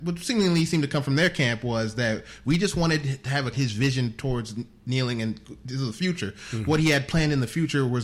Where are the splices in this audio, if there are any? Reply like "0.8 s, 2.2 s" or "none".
3.5 s